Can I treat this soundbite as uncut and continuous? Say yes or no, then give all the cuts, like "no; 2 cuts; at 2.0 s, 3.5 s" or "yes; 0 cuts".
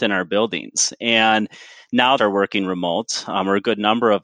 no; 1 cut; at 2.2 s